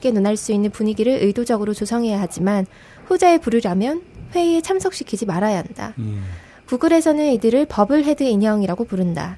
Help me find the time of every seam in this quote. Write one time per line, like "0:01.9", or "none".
none